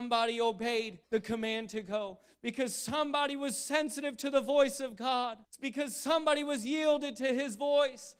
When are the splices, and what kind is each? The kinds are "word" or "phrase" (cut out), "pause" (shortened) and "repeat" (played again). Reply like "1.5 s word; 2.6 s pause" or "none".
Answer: 1.0 s pause; 5.4 s pause

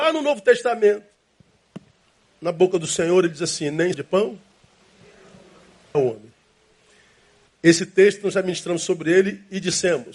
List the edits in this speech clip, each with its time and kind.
3.9 s word; 5.9 s word

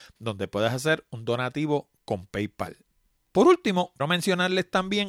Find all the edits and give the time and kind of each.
4.0 s word

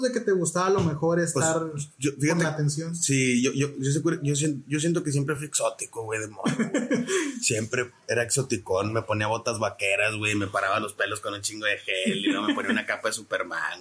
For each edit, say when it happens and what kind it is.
none

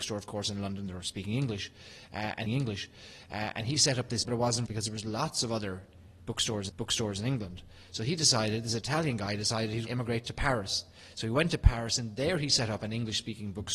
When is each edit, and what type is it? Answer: 2.5 s repeat; 4.2 s word; 4.7 s phrase; 6.7 s repeat; 9.9 s word

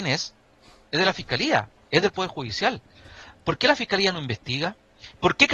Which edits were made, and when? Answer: none

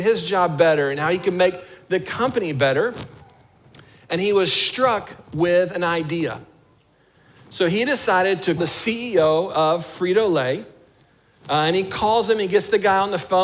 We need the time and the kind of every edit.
8.6 s word

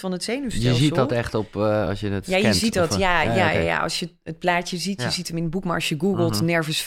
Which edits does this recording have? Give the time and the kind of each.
none

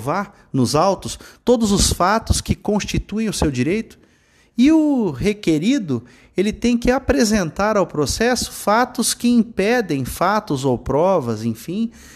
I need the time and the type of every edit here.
none

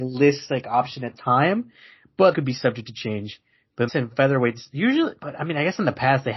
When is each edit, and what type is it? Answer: 1.2 s word; 2.3 s word; 3.9 s word

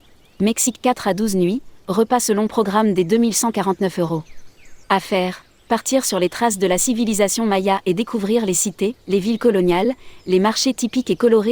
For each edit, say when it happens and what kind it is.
4.8 s pause; 9.0 s pause

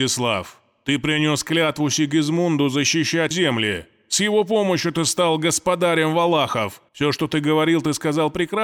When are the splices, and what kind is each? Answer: 3.3 s word; 6.9 s pause

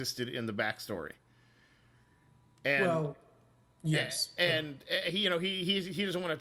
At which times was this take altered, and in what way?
none

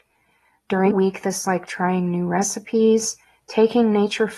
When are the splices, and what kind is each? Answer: 0.9 s word; 1.4 s word

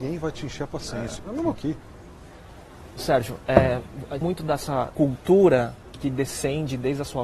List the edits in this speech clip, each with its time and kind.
1.5 s word; 4.2 s word; 4.9 s word; 6.0 s word

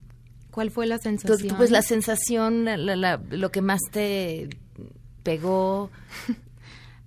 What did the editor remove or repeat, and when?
none

